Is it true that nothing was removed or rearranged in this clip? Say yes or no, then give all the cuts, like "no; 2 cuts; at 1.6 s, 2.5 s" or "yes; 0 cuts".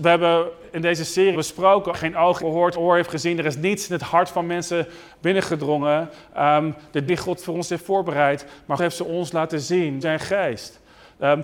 no; 7 cuts; at 1.3 s, 1.9 s, 2.4 s, 2.7 s, 7.1 s, 8.8 s, 10.0 s